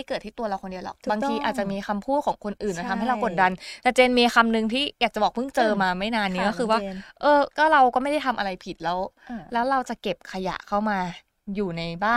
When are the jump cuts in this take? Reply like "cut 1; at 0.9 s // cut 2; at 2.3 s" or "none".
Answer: cut 1; at 7.5 s